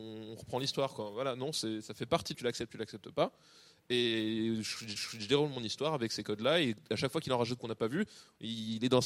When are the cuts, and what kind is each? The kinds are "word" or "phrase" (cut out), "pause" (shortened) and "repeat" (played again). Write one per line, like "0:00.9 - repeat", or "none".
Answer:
0:02.3 - phrase
0:05.0 - repeat
0:07.6 - phrase